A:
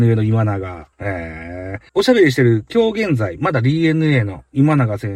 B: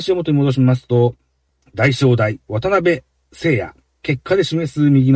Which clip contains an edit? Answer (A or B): A